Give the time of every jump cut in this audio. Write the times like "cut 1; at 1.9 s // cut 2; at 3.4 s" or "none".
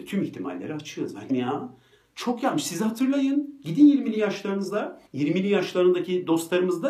cut 1; at 1.3 s // cut 2; at 5.1 s